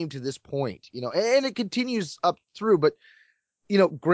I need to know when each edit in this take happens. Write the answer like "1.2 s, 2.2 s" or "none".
none